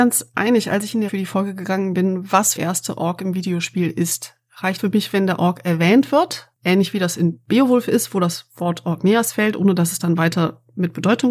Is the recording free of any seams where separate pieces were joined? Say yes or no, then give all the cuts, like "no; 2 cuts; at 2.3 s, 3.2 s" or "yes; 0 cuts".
no; 4 cuts; at 1.1 s, 2.6 s, 4.8 s, 6.5 s